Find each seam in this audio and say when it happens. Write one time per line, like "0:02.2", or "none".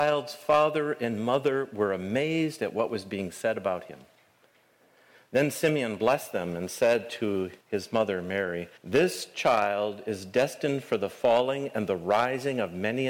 0:07.6
0:08.8